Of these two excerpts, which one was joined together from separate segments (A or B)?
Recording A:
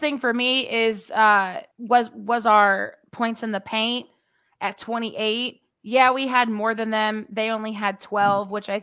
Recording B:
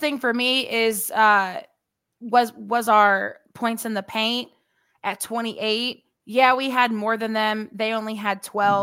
A